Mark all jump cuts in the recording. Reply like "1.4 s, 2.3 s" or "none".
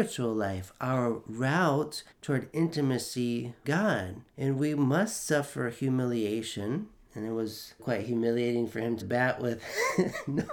2.1 s, 3.6 s, 4.3 s, 7.8 s, 9.0 s